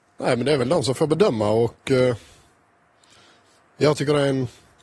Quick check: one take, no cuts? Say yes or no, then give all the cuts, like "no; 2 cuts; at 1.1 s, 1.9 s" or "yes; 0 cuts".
yes; 0 cuts